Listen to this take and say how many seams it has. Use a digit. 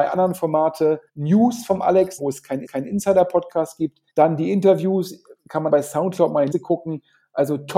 6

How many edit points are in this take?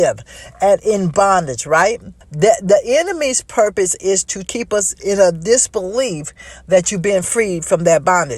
3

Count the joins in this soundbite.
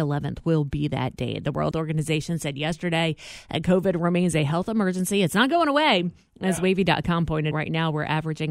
2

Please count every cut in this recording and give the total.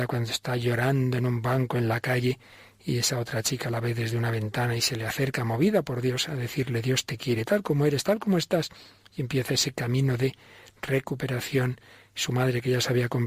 0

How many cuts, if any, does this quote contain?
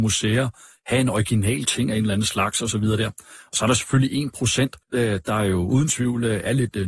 1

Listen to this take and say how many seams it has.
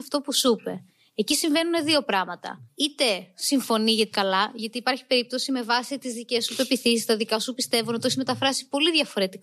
2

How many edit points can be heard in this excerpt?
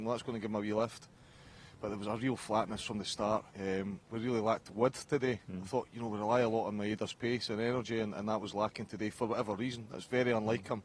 1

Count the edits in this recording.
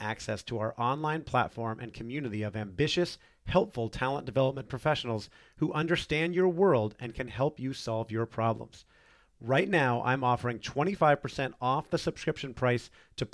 0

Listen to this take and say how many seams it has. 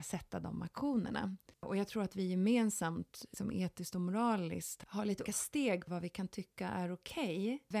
1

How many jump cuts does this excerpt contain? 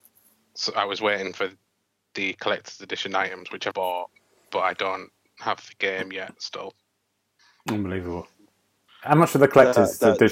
1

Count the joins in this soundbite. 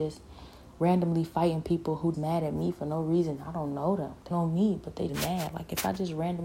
3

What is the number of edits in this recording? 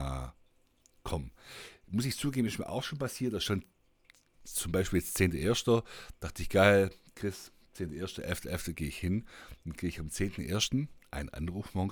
0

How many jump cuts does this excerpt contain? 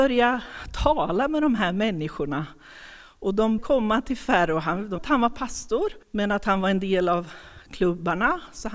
3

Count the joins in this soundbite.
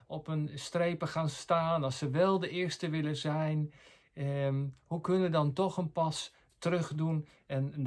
0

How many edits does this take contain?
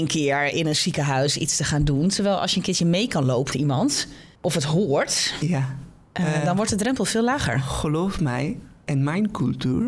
2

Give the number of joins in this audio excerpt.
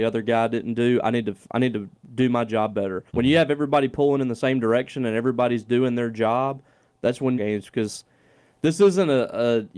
2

